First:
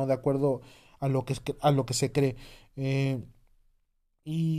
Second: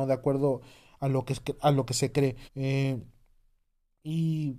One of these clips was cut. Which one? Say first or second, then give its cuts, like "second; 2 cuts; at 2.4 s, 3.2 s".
second; 1 cut; at 2.5 s